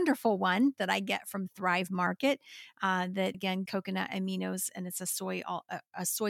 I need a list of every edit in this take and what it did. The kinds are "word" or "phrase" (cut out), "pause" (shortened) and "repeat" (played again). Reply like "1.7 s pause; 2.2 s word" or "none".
3.3 s word; 3.7 s word